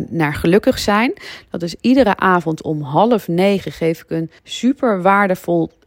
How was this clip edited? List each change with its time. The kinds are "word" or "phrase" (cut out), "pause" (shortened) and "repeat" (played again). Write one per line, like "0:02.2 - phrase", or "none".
0:04.4 - pause